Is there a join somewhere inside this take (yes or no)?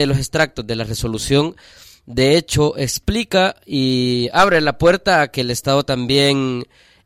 no